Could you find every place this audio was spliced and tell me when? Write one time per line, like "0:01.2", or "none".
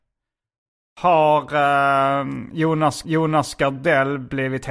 0:03.0